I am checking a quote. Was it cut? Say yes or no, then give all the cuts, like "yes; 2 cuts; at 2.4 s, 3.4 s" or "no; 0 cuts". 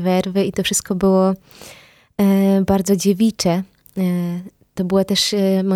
no; 0 cuts